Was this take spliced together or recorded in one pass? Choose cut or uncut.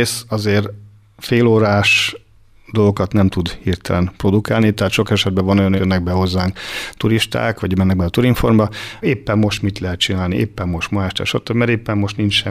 cut